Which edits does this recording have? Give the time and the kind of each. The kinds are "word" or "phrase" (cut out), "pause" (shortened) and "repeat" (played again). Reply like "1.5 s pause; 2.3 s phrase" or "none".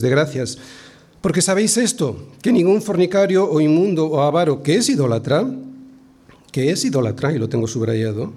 none